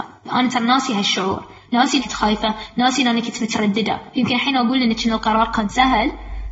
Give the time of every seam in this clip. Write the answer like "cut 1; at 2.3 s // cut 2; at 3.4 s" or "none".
cut 1; at 2.0 s